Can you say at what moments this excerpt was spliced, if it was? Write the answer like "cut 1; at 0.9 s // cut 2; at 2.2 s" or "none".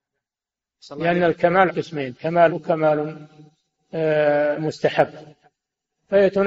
cut 1; at 1.7 s // cut 2; at 2.5 s